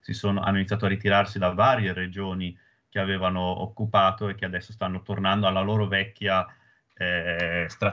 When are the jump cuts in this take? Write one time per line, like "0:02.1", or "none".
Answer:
none